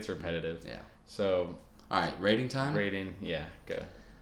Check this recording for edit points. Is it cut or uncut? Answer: uncut